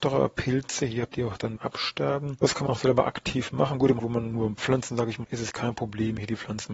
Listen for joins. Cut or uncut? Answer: cut